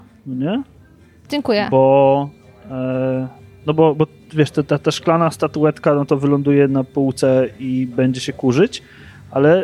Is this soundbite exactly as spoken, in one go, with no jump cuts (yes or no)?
yes